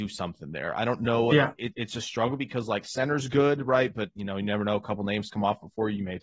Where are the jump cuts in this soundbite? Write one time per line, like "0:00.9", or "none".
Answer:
none